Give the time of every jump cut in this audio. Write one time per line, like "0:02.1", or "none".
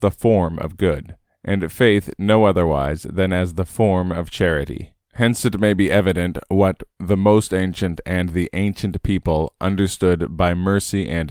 0:01.3
0:05.0